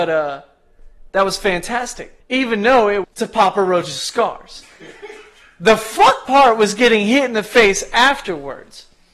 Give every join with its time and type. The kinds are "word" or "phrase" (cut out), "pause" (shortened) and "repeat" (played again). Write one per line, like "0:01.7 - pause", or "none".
0:02.2 - pause
0:03.0 - word
0:06.3 - word